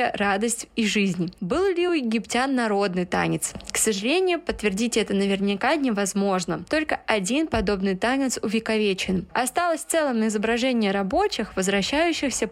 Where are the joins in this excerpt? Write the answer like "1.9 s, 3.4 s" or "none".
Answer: none

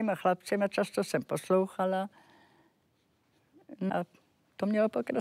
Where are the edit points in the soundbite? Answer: 3.9 s

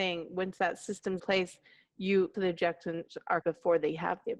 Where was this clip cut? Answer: 1.2 s, 2.3 s, 3.4 s

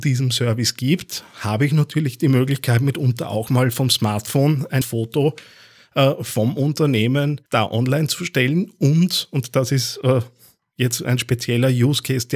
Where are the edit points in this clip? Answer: 4.8 s, 7.5 s, 11.0 s

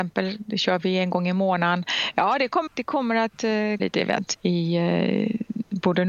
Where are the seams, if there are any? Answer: 2.7 s, 3.8 s, 4.3 s

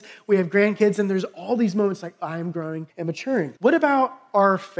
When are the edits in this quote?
2.9 s, 3.6 s

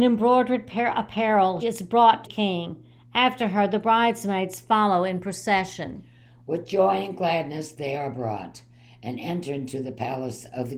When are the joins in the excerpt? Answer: 1.6 s, 2.2 s

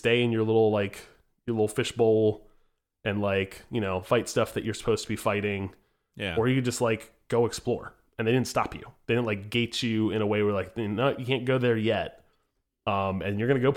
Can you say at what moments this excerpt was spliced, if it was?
none

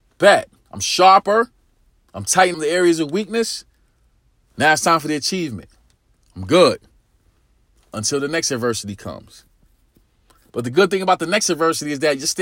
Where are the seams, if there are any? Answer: 2.5 s

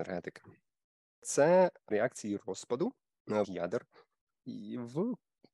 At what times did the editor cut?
1.9 s, 3.4 s

